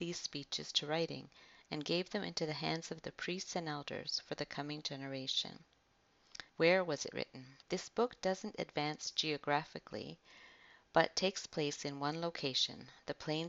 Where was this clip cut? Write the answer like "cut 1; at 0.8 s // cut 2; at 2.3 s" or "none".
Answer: cut 1; at 6.5 s // cut 2; at 7.6 s